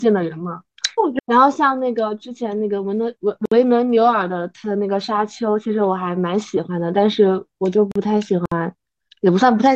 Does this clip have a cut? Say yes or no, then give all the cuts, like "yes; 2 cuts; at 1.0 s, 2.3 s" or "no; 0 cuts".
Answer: no; 0 cuts